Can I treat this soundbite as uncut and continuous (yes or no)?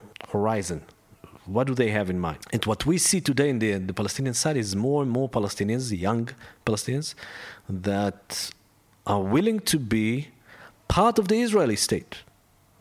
yes